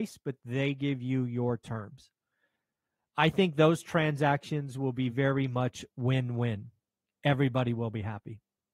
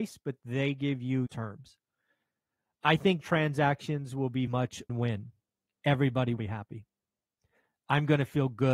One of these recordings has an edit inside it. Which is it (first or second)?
second